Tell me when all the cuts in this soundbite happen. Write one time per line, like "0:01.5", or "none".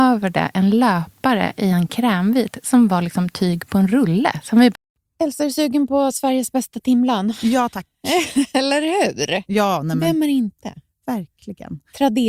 none